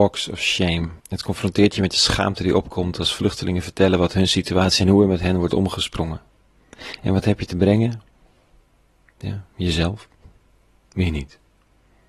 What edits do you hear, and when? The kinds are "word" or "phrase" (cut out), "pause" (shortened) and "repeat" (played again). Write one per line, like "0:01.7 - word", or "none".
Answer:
0:01.0 - pause
0:04.8 - phrase